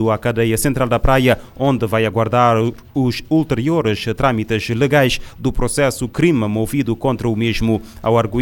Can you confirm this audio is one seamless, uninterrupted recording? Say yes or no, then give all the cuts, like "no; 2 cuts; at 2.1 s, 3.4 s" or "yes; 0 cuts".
yes; 0 cuts